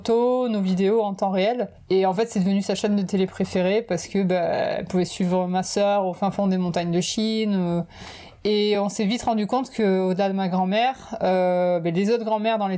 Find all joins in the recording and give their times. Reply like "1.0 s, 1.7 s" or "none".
none